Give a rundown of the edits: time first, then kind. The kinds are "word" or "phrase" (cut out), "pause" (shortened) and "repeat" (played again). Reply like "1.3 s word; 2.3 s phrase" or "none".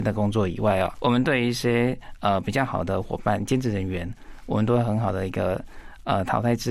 0.9 s word